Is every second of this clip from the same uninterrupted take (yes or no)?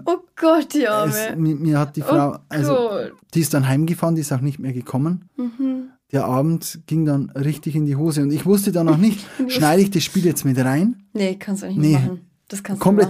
no